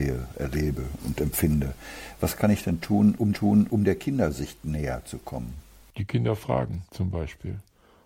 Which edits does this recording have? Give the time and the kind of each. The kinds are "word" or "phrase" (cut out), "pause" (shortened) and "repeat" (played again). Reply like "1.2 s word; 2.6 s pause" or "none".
3.3 s repeat; 6.9 s pause